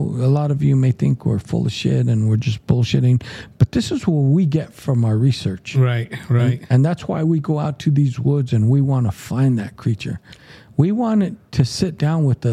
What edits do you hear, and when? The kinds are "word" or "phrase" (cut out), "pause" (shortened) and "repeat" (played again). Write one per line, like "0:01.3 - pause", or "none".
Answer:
none